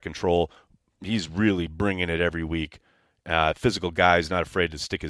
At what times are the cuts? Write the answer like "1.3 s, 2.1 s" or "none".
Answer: none